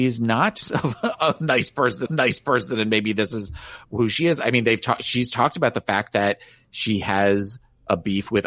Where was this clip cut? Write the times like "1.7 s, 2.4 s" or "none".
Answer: 2.1 s